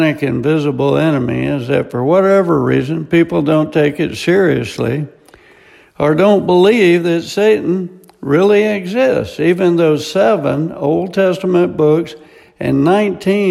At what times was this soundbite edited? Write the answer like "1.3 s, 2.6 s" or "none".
none

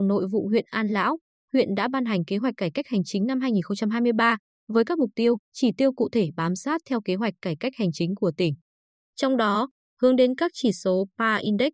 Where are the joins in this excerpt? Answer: 5.4 s

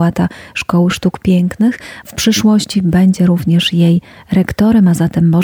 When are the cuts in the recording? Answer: none

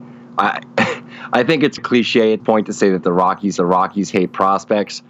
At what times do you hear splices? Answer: 1.8 s, 2.4 s, 3.6 s

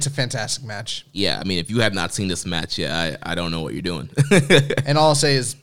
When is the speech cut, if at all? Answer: none

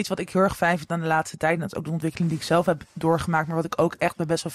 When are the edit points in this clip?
none

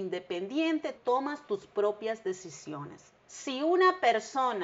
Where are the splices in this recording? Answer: 0.9 s

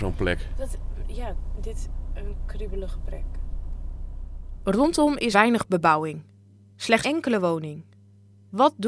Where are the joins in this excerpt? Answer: 1.6 s, 5.3 s, 7.0 s

